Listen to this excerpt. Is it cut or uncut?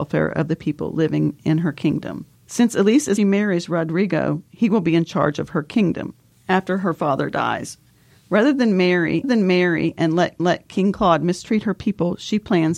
cut